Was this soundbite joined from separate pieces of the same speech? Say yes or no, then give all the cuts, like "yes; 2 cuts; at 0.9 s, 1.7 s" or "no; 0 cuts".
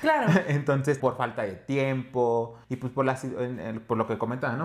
yes; 2 cuts; at 1.0 s, 2.6 s